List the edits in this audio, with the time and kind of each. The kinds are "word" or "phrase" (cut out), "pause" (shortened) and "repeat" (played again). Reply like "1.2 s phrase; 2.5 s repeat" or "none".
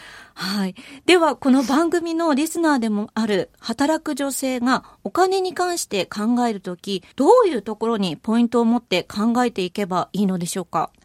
7.1 s pause